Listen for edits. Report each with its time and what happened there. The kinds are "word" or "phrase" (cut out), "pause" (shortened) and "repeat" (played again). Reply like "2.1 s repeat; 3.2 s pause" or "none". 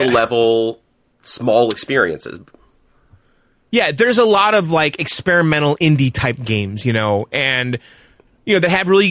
none